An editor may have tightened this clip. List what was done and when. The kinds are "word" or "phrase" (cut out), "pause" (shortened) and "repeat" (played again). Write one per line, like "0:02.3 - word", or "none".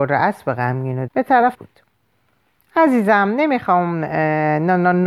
0:01.1 - word
0:01.5 - phrase

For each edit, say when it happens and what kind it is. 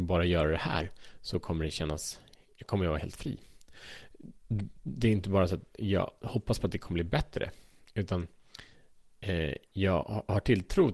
none

